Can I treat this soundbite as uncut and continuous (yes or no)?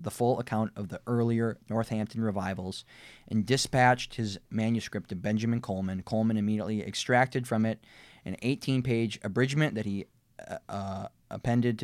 yes